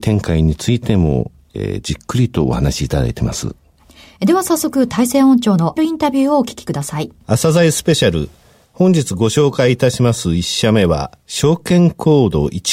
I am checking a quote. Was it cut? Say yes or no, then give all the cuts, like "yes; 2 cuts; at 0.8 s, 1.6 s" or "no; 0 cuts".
yes; 2 cuts; at 5.8 s, 7.2 s